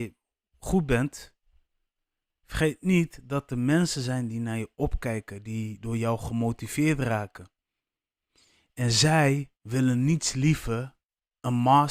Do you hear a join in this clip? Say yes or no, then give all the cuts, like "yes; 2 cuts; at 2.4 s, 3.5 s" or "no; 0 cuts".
yes; 1 cut; at 9.6 s